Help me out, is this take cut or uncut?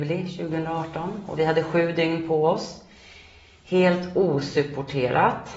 uncut